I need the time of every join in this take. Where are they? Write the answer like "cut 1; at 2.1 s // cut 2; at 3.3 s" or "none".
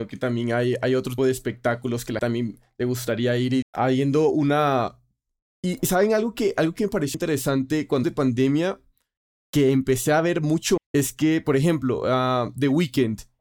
cut 1; at 1.2 s // cut 2; at 2.2 s // cut 3; at 3.6 s // cut 4; at 7.1 s // cut 5; at 8.0 s // cut 6; at 10.8 s